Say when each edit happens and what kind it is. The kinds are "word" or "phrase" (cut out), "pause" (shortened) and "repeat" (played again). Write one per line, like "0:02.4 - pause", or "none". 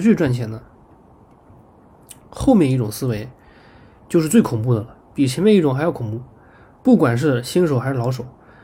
none